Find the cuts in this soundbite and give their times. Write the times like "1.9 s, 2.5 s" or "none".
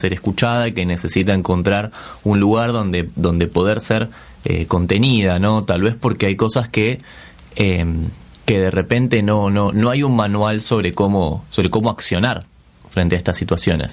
none